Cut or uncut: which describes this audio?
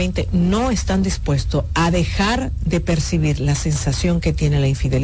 uncut